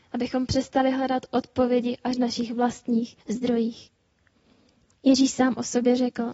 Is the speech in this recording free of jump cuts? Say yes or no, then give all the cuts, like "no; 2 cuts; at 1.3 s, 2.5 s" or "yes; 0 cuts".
no; 2 cuts; at 2.1 s, 3.2 s